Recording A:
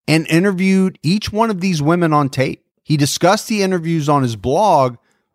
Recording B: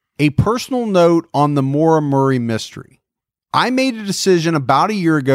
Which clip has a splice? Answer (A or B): A